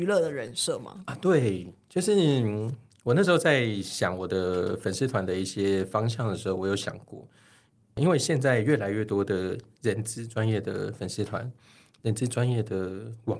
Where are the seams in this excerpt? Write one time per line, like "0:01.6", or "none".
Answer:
none